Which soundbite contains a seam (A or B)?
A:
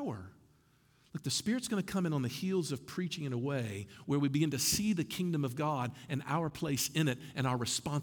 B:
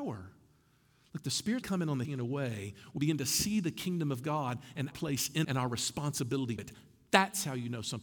B